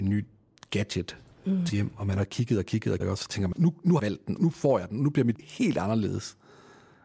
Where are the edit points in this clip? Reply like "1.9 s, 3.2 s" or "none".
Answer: 1.7 s, 3.0 s, 3.5 s, 4.0 s, 4.4 s, 5.3 s